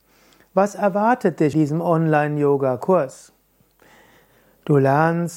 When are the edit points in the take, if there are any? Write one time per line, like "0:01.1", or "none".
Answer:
0:01.5